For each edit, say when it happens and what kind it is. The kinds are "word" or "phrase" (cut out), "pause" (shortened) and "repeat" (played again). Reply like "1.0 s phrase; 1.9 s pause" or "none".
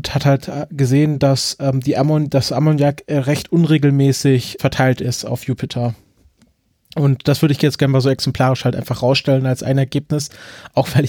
4.6 s word